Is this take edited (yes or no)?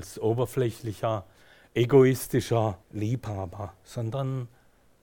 yes